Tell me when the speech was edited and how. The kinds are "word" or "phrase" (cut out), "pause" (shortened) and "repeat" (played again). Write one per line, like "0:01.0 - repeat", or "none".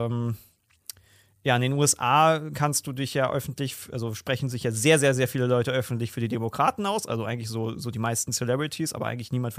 none

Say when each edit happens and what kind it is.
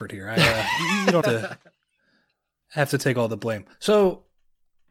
0:01.2 - word
0:03.7 - pause

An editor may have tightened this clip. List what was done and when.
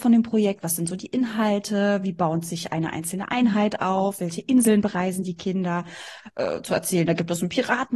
none

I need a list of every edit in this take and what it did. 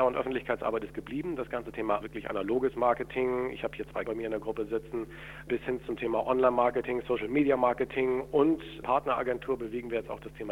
0:02.0 - phrase
0:04.0 - word
0:08.8 - phrase

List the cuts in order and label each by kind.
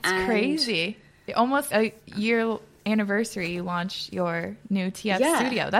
0:01.7 - word

